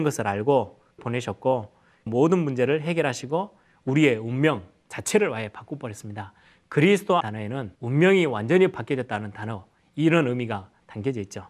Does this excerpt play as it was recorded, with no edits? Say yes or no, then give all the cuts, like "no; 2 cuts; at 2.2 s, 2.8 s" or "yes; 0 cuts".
no; 4 cuts; at 1.0 s, 2.1 s, 7.2 s, 7.7 s